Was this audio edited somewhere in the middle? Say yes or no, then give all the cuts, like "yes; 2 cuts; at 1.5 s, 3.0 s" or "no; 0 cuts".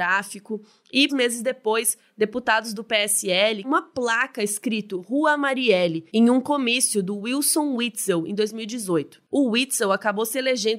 yes; 3 cuts; at 1.1 s, 3.6 s, 6.1 s